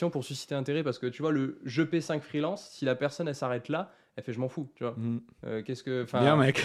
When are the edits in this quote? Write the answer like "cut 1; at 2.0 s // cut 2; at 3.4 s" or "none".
none

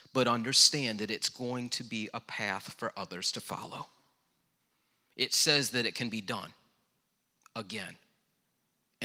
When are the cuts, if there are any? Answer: none

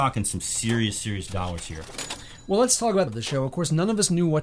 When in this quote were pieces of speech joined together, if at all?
cut 1; at 3.1 s

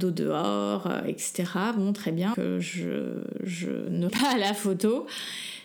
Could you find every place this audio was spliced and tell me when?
cut 1; at 2.3 s // cut 2; at 4.1 s

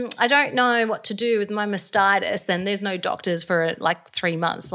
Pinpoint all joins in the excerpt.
none

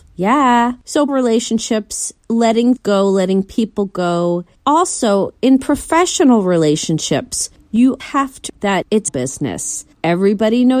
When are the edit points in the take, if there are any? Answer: cut 1; at 1.1 s // cut 2; at 2.8 s // cut 3; at 8.0 s // cut 4; at 8.5 s // cut 5; at 9.1 s

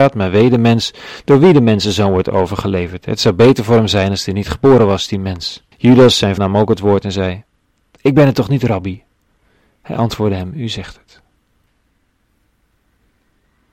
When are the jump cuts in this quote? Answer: cut 1; at 5.7 s // cut 2; at 6.4 s

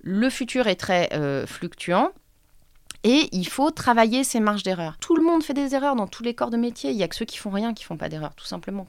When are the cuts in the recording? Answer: none

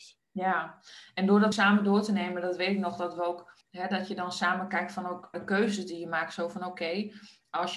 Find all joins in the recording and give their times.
cut 1; at 1.5 s // cut 2; at 3.6 s // cut 3; at 5.3 s

